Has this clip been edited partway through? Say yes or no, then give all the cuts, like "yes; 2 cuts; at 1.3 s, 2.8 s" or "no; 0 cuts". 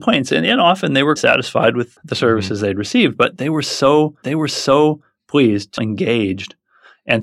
yes; 4 cuts; at 1.2 s, 2.0 s, 4.2 s, 5.8 s